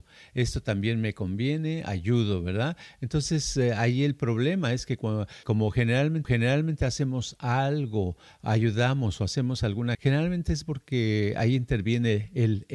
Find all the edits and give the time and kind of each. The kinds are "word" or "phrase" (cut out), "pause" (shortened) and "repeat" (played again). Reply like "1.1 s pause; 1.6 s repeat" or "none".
5.4 s word; 6.2 s repeat; 9.9 s phrase

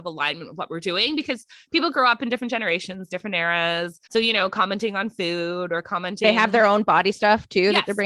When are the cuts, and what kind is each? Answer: 4.1 s pause

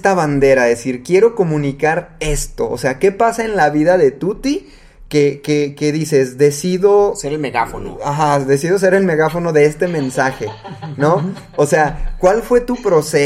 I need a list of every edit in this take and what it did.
none

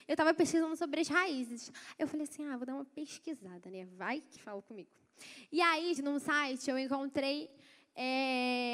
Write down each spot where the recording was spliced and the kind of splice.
4.4 s word; 6.0 s word

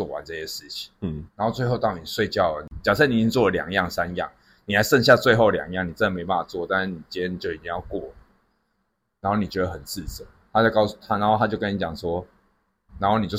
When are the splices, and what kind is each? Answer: 1.3 s pause

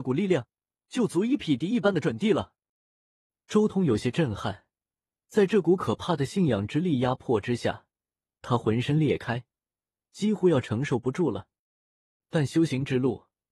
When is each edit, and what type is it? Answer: none

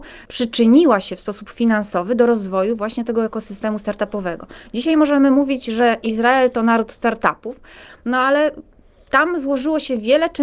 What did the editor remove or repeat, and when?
none

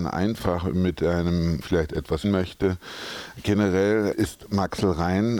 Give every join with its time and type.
1.6 s phrase; 2.2 s word; 4.1 s word

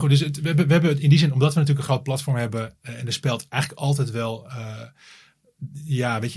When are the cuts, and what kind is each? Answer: none

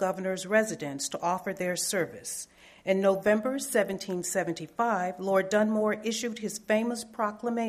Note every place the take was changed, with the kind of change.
none

